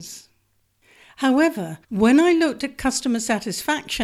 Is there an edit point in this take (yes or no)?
yes